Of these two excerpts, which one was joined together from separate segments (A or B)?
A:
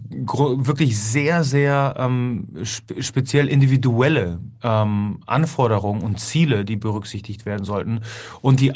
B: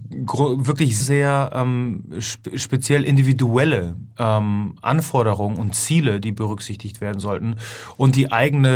B